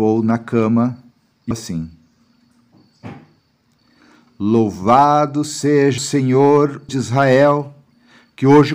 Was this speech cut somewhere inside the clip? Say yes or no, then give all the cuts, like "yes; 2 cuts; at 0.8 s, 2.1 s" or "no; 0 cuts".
yes; 3 cuts; at 1.5 s, 6.0 s, 6.9 s